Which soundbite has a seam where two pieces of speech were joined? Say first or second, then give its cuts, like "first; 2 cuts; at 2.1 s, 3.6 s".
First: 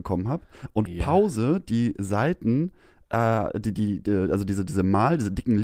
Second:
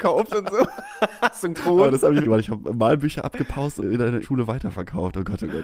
second; 4 cuts; at 1.5 s, 2.2 s, 3.8 s, 4.2 s